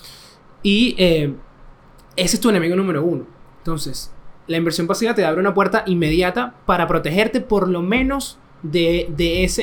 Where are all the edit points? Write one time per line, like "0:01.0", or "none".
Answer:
none